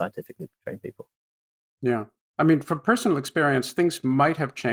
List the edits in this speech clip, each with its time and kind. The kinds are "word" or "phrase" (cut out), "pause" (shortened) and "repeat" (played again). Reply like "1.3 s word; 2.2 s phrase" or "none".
none